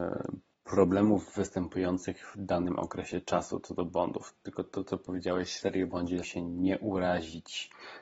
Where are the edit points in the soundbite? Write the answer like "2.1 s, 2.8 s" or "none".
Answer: 2.3 s, 5.6 s, 6.2 s